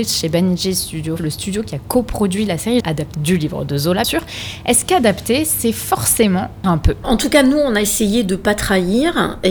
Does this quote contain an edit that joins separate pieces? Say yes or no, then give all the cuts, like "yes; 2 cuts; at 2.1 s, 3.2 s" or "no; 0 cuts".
yes; 6 cuts; at 1.2 s, 2.8 s, 3.1 s, 4.0 s, 6.6 s, 7.0 s